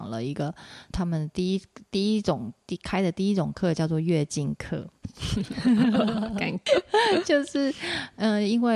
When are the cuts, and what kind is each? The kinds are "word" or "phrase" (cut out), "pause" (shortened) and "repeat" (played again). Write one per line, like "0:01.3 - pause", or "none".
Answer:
0:00.9 - word
0:06.7 - word